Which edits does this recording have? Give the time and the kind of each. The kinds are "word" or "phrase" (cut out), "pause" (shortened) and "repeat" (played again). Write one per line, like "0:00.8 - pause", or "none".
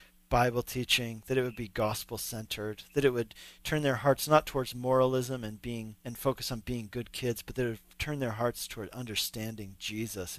0:06.0 - pause